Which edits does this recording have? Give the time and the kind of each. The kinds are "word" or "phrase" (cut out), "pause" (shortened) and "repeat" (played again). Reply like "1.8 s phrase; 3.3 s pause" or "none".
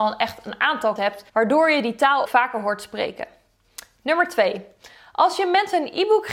1.0 s word; 1.3 s pause; 2.2 s word